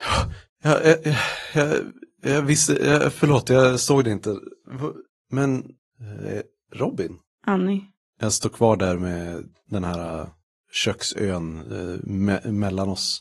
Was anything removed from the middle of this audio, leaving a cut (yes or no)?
no